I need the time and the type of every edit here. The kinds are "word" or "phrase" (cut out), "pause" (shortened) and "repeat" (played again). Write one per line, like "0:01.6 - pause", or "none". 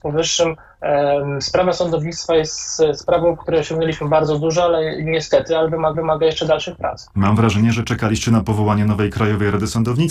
0:05.9 - repeat